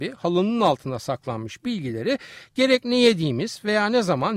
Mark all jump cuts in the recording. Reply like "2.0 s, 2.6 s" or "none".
none